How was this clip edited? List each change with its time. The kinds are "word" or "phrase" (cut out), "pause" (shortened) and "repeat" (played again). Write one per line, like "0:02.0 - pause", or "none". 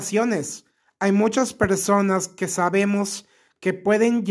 none